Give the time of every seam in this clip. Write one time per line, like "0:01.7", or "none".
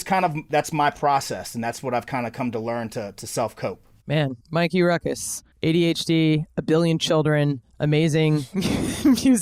0:04.4
0:05.5